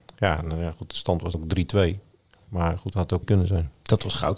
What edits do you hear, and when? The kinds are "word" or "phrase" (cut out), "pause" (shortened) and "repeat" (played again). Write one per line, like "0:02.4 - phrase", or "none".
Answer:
0:01.3 - word
0:02.9 - phrase
0:03.2 - word